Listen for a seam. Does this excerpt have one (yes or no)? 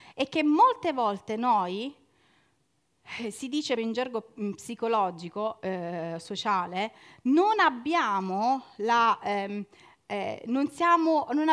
yes